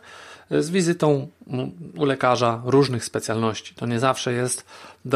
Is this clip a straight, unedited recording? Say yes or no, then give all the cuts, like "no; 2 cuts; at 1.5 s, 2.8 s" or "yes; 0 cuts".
yes; 0 cuts